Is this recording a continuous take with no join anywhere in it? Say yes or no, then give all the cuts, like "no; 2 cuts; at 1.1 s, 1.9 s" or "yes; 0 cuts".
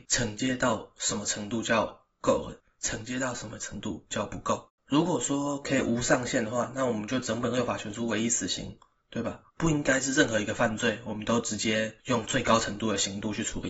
no; 4 cuts; at 2.6 s, 9.0 s, 9.5 s, 12.0 s